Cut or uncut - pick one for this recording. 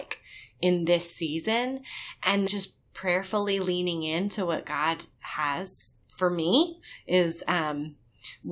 cut